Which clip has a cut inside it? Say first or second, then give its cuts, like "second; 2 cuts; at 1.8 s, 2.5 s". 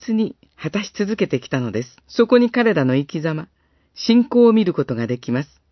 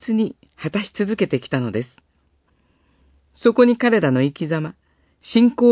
first; 1 cut; at 2.0 s